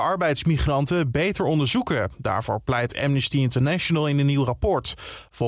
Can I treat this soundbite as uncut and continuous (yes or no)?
yes